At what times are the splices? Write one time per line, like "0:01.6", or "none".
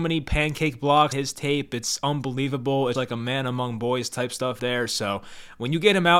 0:01.1
0:02.9
0:04.6